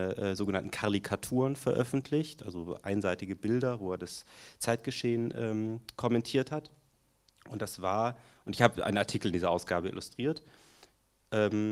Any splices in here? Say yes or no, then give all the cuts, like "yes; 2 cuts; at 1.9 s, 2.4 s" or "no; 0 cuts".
no; 0 cuts